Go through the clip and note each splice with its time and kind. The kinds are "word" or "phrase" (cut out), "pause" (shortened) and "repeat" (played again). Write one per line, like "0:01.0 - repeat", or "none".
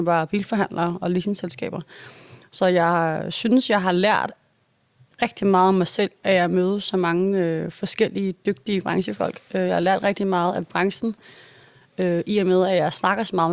none